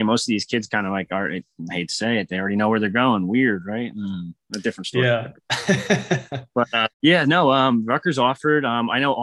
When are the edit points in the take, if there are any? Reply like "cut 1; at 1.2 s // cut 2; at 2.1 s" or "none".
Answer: cut 1; at 6.9 s